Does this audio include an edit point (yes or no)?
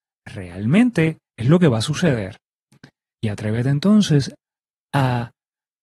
no